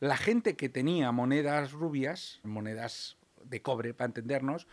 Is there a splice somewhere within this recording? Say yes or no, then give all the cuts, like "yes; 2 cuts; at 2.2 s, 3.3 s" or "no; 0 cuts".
yes; 1 cut; at 2.4 s